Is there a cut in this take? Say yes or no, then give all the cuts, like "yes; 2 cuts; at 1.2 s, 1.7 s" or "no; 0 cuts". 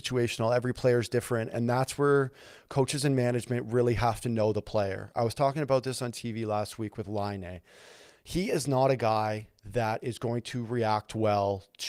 yes; 1 cut; at 9.6 s